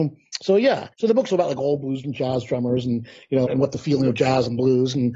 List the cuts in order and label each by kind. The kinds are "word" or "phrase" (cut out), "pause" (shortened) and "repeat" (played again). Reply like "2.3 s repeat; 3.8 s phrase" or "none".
0.9 s pause; 1.3 s word; 2.0 s word; 3.5 s word